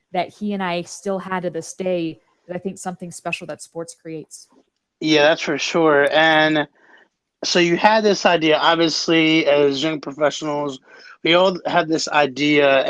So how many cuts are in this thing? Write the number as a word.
zero